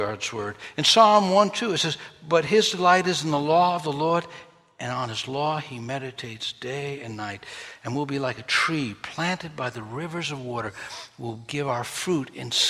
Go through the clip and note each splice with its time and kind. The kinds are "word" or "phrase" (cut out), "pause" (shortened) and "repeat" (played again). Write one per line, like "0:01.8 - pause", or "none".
none